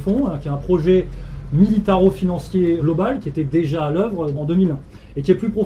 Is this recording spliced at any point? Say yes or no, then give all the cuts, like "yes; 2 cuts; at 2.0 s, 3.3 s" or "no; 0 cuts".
no; 0 cuts